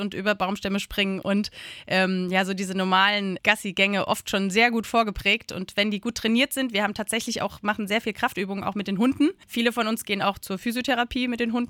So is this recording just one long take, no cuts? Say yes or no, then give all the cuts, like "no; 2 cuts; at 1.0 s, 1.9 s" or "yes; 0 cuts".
yes; 0 cuts